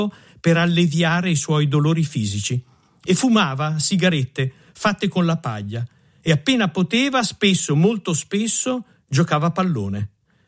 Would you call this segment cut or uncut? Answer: uncut